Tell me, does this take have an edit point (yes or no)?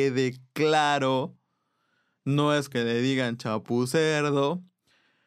yes